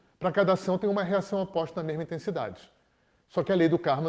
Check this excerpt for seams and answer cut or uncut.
uncut